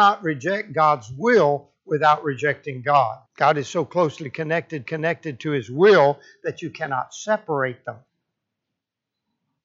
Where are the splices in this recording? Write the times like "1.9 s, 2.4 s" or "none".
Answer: 3.3 s, 4.9 s